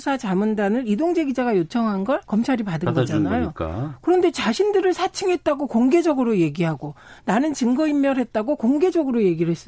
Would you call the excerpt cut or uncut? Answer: cut